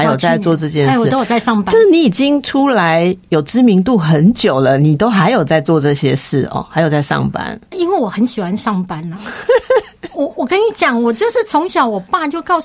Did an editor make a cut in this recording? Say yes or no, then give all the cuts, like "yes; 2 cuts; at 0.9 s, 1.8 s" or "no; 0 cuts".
no; 0 cuts